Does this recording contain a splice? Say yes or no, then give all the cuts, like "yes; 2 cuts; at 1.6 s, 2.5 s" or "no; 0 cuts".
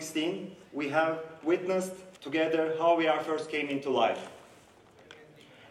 yes; 1 cut; at 2.2 s